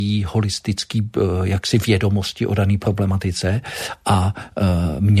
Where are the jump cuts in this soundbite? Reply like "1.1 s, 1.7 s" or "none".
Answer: none